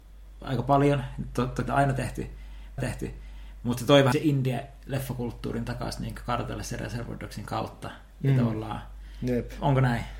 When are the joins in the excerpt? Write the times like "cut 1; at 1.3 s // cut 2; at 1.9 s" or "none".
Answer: cut 1; at 1.7 s // cut 2; at 2.8 s // cut 3; at 4.1 s